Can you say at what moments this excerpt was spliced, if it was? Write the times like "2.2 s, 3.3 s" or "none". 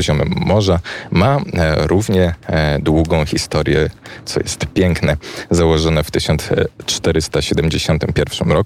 none